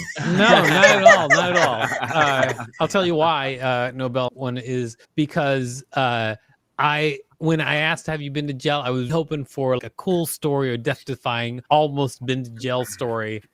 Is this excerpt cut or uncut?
cut